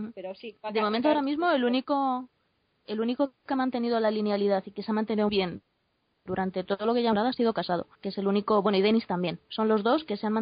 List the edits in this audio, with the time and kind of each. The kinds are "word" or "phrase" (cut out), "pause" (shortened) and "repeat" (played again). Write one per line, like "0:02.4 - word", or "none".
0:05.3 - word
0:07.9 - pause